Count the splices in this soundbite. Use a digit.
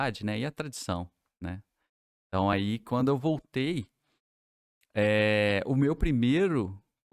0